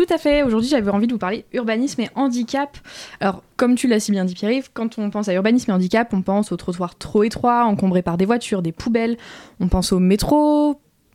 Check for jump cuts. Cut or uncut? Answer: cut